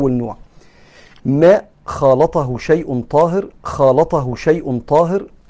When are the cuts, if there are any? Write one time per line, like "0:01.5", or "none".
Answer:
0:01.2
0:03.6